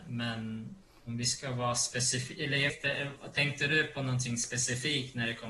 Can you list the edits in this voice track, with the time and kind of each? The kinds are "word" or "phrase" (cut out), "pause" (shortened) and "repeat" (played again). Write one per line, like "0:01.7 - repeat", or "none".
0:02.7 - word